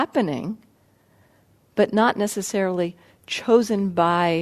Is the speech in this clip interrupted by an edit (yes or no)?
no